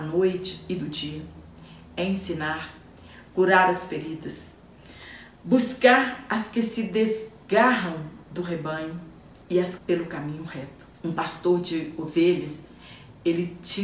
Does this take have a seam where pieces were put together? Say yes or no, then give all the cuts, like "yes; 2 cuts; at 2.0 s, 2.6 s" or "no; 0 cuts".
yes; 2 cuts; at 9.8 s, 10.9 s